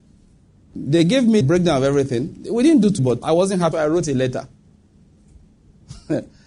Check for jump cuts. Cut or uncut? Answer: cut